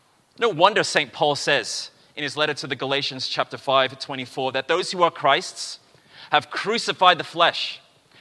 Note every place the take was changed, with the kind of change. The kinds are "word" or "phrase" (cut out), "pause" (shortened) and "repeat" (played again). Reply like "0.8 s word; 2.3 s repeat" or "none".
none